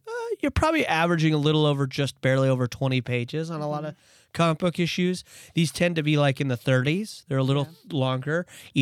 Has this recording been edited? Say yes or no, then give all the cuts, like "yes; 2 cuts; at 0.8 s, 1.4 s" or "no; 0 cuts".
no; 0 cuts